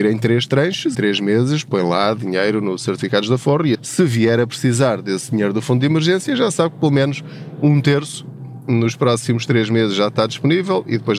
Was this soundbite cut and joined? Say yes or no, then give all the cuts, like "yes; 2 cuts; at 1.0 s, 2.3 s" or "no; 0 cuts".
yes; 2 cuts; at 0.9 s, 3.7 s